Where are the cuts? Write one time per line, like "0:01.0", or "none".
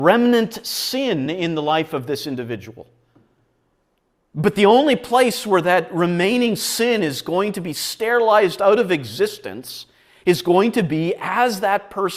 none